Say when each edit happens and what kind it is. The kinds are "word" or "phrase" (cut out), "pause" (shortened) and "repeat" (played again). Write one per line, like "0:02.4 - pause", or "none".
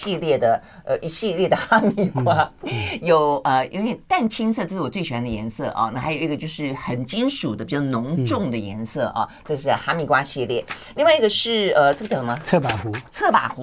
none